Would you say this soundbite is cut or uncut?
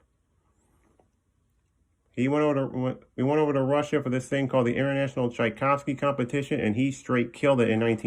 uncut